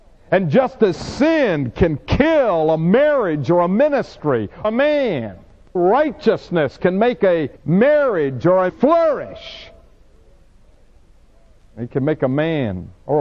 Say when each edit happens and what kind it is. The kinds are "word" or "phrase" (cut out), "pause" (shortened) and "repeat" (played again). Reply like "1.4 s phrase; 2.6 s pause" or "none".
4.6 s word; 5.8 s word; 7.6 s pause; 8.7 s word